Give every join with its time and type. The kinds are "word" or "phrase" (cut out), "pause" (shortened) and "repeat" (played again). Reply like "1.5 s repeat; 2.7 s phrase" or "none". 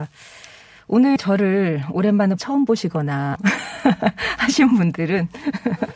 1.2 s word; 2.4 s word; 3.4 s word